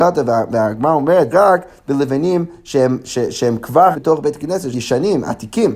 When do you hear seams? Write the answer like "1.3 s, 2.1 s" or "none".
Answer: 1.3 s, 3.9 s, 4.7 s